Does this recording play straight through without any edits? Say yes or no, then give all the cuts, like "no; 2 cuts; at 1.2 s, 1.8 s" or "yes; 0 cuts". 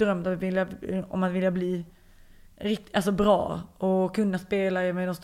yes; 0 cuts